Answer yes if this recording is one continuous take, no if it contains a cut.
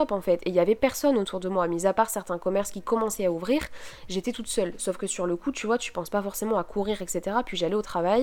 yes